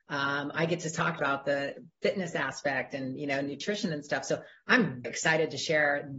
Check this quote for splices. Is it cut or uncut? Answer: cut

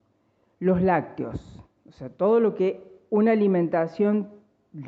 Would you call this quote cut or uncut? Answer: uncut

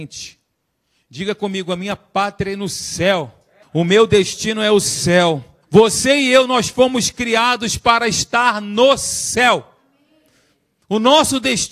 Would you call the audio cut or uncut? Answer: cut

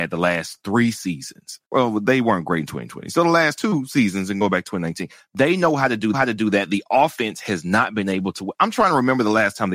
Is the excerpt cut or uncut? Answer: cut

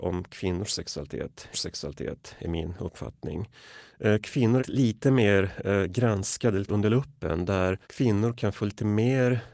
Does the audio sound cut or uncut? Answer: cut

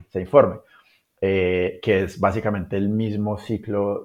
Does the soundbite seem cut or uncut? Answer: uncut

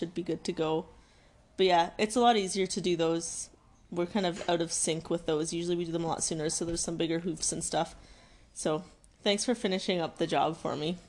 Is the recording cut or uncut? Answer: uncut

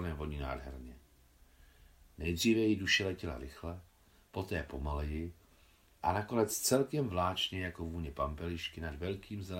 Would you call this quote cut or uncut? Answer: uncut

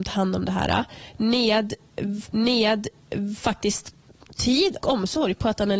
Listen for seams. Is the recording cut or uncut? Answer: cut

